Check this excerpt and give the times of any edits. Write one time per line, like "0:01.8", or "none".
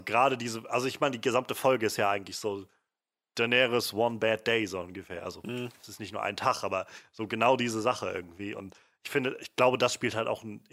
none